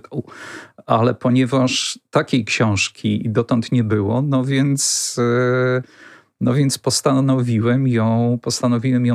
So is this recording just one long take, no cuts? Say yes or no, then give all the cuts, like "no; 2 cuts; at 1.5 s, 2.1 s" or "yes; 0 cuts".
yes; 0 cuts